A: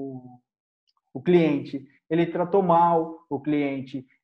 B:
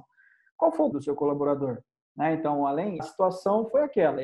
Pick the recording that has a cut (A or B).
B